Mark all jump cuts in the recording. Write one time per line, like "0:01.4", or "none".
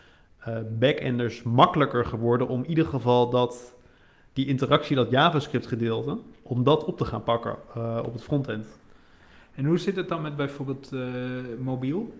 none